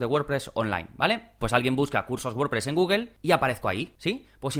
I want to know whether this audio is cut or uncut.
uncut